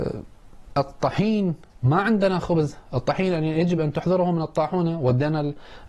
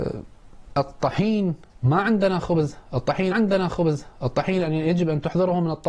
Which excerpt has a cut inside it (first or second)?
second